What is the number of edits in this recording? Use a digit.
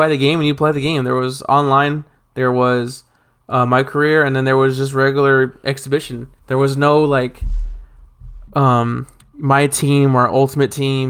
1